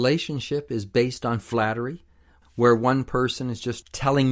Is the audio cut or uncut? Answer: uncut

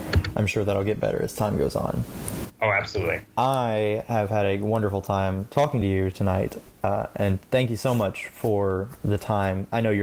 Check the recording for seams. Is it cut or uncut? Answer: uncut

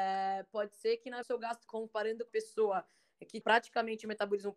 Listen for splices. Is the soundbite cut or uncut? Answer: cut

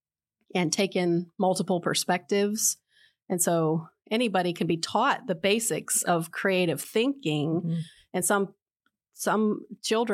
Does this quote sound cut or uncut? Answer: uncut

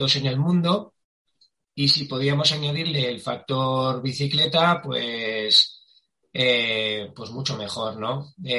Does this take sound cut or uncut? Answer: uncut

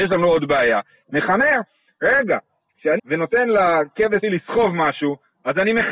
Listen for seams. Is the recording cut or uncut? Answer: cut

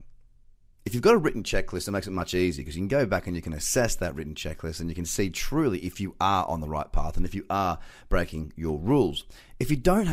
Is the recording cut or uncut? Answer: uncut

